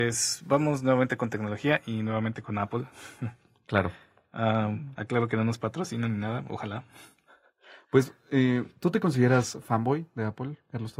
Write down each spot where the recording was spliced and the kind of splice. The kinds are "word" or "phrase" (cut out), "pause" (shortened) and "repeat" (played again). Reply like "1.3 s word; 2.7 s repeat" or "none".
none